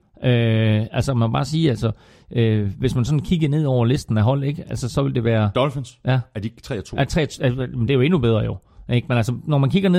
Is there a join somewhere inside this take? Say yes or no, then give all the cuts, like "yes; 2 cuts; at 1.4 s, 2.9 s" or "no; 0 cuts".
no; 0 cuts